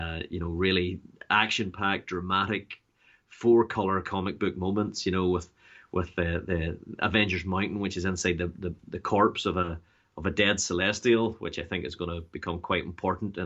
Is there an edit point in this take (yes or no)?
no